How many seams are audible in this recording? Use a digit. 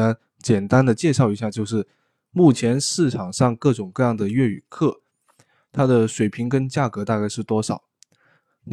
0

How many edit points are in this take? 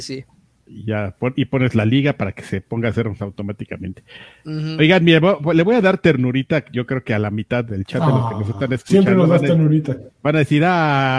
2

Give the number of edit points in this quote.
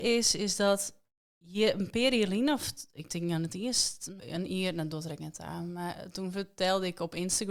1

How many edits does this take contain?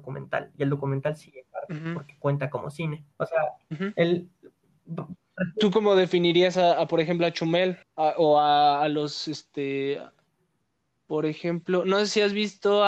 2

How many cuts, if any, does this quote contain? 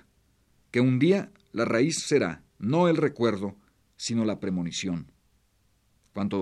0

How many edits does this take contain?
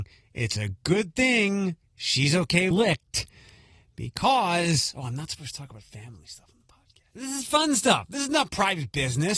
1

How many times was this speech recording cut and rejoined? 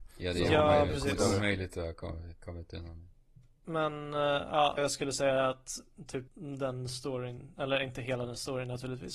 2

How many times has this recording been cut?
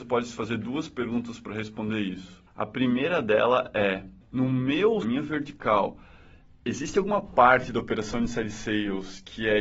3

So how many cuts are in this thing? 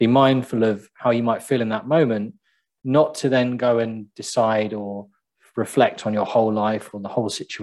0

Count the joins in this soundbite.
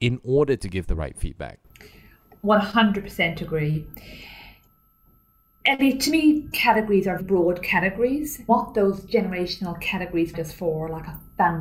4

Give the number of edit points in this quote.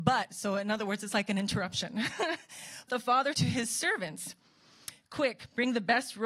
3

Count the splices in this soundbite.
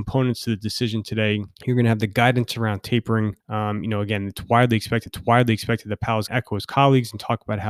4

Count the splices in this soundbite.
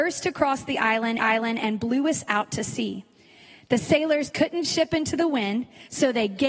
2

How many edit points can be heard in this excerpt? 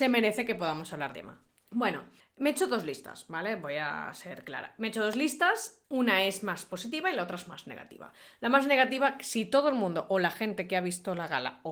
1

